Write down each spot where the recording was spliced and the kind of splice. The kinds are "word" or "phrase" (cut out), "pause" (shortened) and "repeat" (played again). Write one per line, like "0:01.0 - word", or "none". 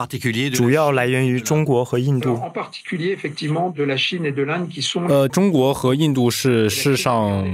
0:05.3 - phrase